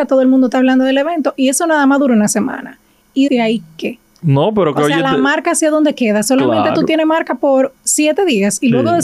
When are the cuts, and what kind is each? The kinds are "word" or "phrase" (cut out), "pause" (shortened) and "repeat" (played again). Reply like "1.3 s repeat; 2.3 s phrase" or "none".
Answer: 3.3 s word